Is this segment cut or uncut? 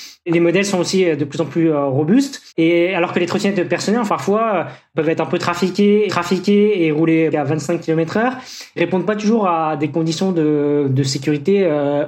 cut